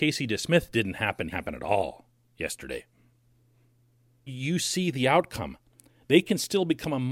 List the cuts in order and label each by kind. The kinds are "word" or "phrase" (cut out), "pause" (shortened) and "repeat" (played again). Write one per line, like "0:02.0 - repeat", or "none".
0:01.3 - phrase
0:04.3 - word